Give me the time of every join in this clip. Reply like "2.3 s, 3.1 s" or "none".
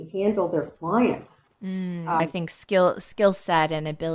1.5 s, 2.2 s